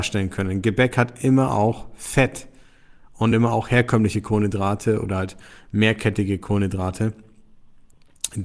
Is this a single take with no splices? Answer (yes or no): yes